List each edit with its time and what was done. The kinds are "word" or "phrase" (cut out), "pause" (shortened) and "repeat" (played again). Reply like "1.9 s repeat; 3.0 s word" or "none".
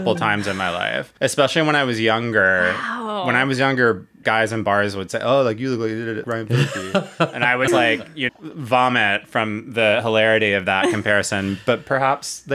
1.2 s pause; 4.2 s word; 6.2 s word; 7.7 s word; 8.3 s word